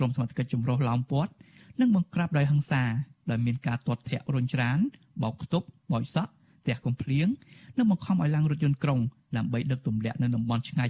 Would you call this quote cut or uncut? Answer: uncut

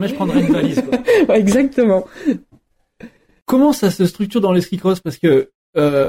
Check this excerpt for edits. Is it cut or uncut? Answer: uncut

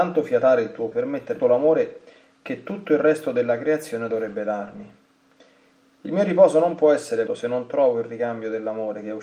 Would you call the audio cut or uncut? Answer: cut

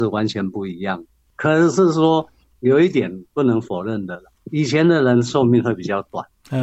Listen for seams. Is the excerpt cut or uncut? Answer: uncut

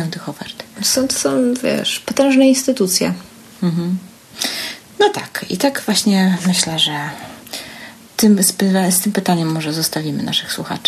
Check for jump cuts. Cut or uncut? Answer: uncut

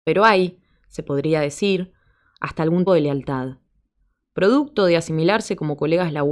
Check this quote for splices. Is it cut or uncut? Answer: cut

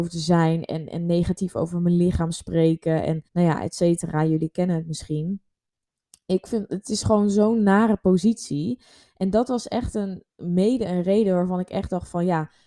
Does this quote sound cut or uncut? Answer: cut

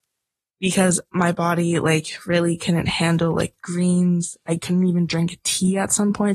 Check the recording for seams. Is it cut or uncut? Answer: uncut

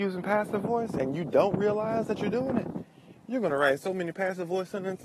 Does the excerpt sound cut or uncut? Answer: uncut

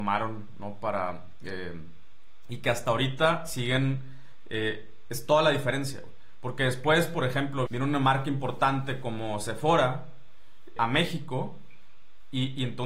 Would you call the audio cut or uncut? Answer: cut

